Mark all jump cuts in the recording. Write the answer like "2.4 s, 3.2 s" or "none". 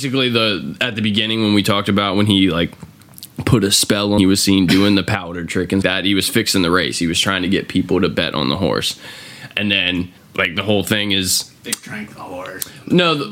4.2 s, 5.8 s, 10.2 s, 11.6 s